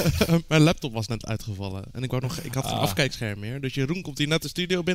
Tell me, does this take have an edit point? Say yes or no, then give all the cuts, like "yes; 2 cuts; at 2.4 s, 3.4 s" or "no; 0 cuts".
no; 0 cuts